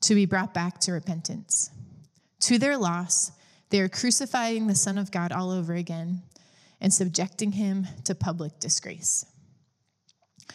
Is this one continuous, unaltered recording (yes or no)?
yes